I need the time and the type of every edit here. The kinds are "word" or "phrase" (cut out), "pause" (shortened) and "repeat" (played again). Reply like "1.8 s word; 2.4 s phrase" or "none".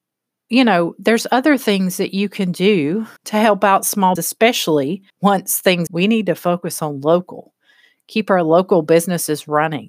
3.2 s pause; 4.2 s word; 5.1 s pause; 5.9 s phrase